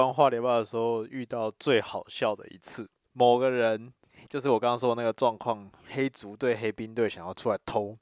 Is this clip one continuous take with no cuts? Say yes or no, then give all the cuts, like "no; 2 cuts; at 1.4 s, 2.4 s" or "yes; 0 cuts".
yes; 0 cuts